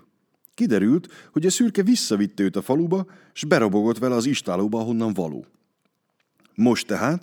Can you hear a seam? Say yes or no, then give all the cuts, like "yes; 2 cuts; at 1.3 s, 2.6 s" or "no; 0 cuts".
no; 0 cuts